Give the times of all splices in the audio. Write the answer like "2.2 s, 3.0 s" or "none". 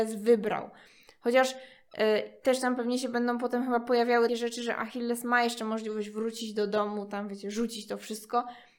4.3 s